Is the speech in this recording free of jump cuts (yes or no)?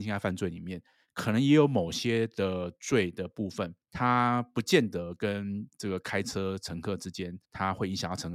no